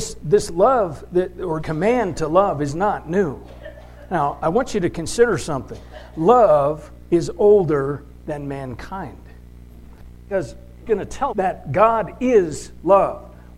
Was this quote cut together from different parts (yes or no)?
yes